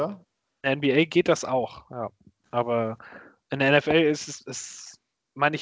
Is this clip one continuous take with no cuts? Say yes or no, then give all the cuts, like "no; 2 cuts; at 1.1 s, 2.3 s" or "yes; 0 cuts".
yes; 0 cuts